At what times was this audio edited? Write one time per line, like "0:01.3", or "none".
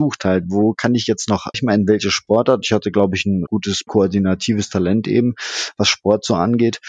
0:01.5
0:03.5
0:03.9

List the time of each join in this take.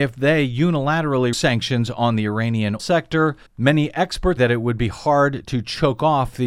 0:01.3
0:02.8
0:03.5
0:04.4

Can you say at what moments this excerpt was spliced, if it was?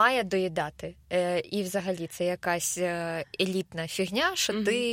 none

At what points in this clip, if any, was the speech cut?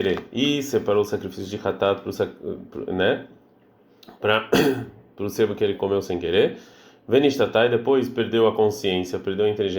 none

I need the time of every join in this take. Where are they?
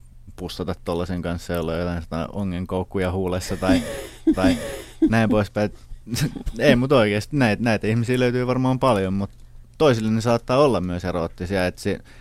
0:04.3

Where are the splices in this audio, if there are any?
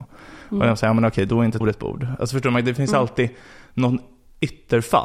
0:01.6

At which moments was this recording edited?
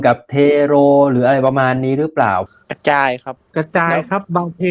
0:03.4

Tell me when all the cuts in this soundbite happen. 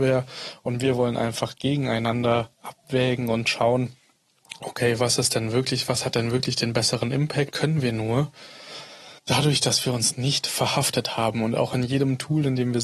0:02.5
0:07.5
0:09.2

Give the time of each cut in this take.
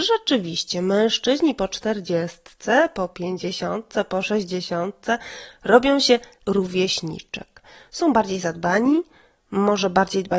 0:06.4

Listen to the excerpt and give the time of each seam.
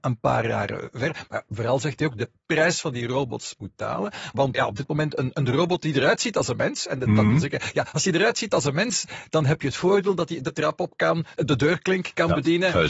0:04.5

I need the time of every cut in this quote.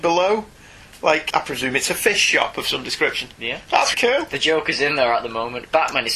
0:01.3
0:03.9

